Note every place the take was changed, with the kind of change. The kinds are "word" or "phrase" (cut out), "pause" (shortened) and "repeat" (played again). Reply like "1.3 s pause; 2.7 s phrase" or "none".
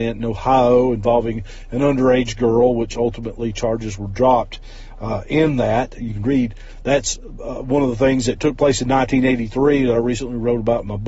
none